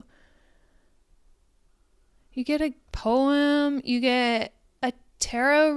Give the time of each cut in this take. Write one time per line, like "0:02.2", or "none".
none